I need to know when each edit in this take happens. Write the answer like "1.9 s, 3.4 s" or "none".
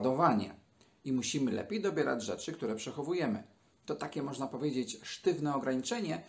none